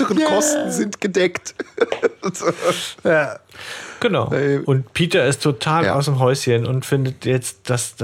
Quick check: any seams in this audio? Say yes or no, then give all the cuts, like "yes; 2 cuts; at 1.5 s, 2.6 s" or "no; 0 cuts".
no; 0 cuts